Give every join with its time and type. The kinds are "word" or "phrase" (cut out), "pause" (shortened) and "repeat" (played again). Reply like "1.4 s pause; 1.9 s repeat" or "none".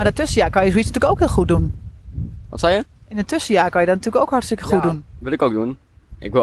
none